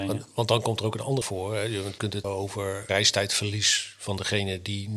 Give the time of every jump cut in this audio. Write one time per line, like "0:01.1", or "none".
0:01.2
0:02.2